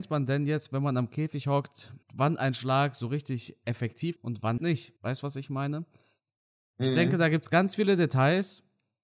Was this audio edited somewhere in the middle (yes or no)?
yes